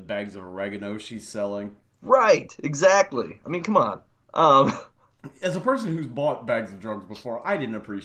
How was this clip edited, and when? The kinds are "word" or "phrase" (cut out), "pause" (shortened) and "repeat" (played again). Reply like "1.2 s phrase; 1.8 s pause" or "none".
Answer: 1.8 s pause; 4.1 s pause